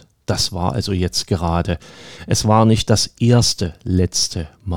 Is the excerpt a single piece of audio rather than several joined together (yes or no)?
yes